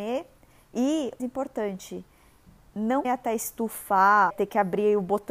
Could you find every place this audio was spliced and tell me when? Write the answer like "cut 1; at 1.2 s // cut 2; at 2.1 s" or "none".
cut 1; at 1.2 s // cut 2; at 3.0 s // cut 3; at 4.3 s